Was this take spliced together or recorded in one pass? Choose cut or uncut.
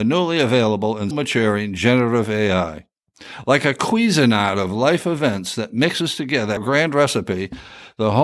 cut